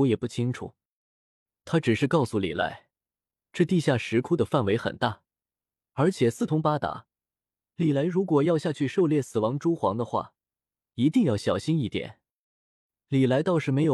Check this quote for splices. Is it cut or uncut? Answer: uncut